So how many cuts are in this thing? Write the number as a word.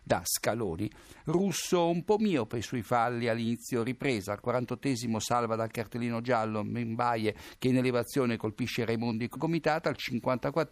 one